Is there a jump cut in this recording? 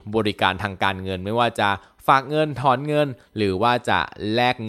no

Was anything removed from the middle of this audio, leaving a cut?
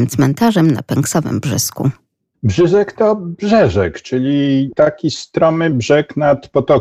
no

